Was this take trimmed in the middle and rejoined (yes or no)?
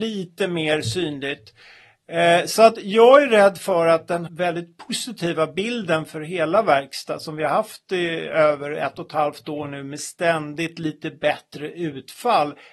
yes